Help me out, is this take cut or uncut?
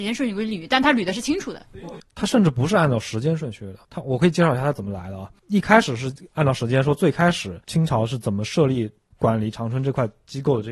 cut